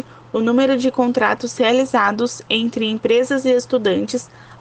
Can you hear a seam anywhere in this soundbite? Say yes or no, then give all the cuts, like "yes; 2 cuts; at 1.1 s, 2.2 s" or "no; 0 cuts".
no; 0 cuts